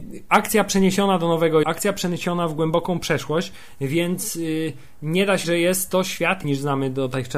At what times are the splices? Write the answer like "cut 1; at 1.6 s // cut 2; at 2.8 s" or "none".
cut 1; at 1.6 s // cut 2; at 5.4 s // cut 3; at 6.4 s